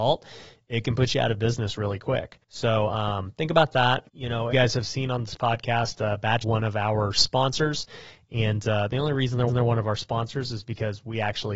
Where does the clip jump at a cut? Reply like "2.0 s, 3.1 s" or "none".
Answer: 2.4 s, 4.1 s, 4.5 s, 6.4 s, 9.5 s